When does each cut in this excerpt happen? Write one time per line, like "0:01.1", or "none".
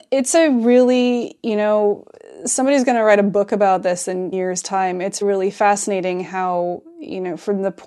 0:04.3
0:05.2